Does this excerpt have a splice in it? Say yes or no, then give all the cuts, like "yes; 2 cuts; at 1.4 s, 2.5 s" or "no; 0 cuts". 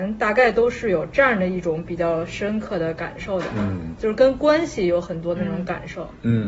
yes; 1 cut; at 4.0 s